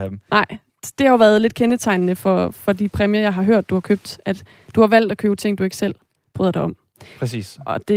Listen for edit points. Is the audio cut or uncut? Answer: uncut